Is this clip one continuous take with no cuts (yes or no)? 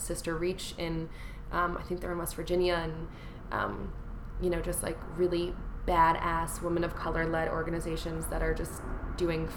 yes